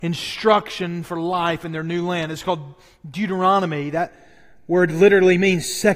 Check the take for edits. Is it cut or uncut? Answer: uncut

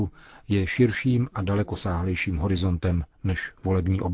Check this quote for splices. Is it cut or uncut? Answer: uncut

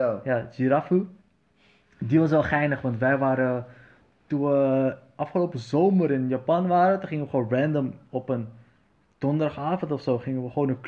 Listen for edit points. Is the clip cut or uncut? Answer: uncut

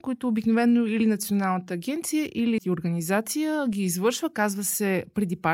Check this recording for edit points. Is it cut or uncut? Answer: cut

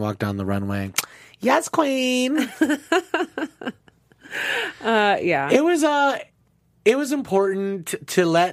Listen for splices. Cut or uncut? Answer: uncut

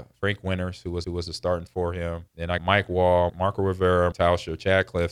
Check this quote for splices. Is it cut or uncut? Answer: cut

